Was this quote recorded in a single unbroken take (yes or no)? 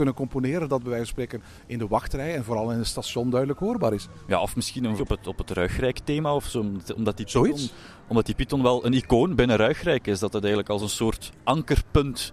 no